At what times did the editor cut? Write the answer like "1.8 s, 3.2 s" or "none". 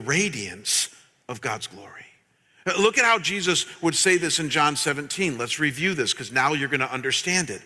none